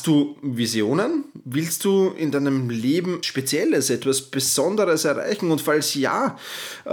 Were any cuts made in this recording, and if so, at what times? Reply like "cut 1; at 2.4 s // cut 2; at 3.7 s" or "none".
cut 1; at 3.2 s

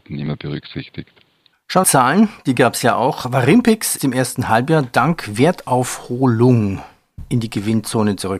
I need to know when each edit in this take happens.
cut 1; at 1.8 s // cut 2; at 4.0 s

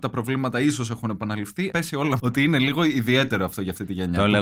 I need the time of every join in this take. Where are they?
cut 1; at 1.7 s // cut 2; at 2.2 s

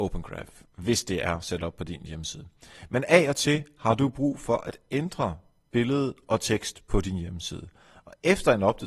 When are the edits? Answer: none

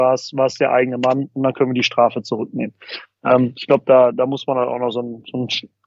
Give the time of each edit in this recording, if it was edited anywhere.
none

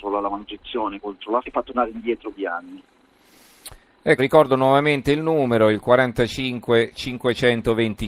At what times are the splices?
cut 1; at 1.4 s // cut 2; at 2.3 s // cut 3; at 4.2 s

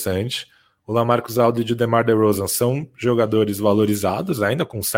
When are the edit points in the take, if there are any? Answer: none

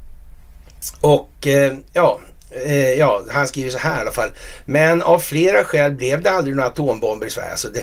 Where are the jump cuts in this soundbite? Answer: none

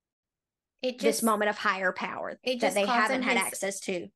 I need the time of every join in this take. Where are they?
none

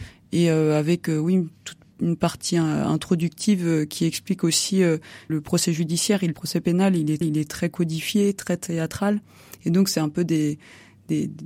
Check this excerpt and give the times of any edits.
cut 1; at 5.3 s // cut 2; at 6.3 s // cut 3; at 7.2 s

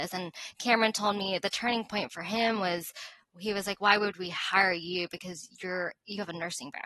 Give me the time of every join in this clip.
none

